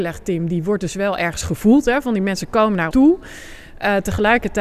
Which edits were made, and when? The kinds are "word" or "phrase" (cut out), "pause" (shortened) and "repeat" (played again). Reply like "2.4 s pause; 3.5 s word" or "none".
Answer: 2.9 s word